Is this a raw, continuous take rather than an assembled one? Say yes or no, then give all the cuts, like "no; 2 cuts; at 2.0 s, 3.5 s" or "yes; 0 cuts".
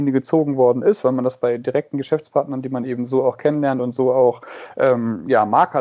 yes; 0 cuts